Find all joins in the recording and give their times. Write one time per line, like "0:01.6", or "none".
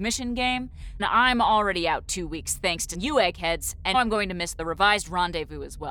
0:01.0
0:02.9
0:03.9